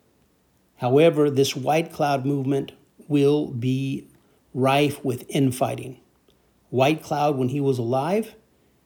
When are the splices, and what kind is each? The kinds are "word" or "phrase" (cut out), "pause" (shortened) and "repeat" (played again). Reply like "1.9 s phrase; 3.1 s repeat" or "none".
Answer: none